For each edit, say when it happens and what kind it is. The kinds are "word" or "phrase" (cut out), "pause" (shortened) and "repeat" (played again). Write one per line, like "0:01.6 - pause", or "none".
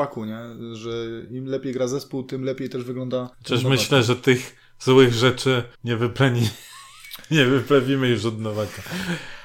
0:03.3 - pause
0:05.7 - pause